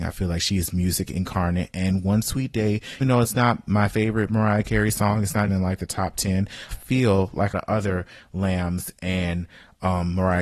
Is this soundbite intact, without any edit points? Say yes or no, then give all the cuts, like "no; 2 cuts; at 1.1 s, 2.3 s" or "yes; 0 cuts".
no; 4 cuts; at 3.0 s, 5.5 s, 6.7 s, 7.5 s